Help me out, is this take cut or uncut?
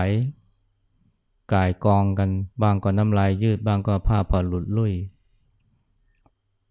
cut